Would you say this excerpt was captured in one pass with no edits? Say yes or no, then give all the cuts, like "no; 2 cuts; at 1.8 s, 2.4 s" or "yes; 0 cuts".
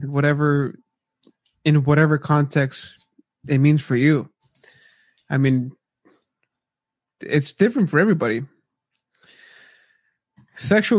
yes; 0 cuts